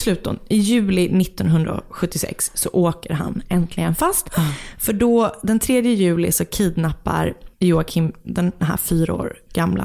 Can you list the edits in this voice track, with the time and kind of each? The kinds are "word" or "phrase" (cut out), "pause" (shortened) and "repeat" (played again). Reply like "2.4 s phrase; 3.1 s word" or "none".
7.5 s pause